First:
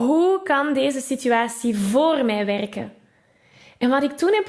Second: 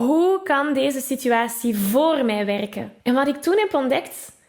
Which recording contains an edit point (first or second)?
second